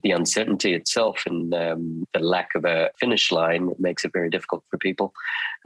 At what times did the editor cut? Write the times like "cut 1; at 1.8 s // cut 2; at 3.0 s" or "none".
none